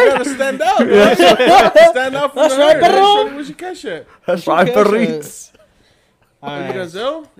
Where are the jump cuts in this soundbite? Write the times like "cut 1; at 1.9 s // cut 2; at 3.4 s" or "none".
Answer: none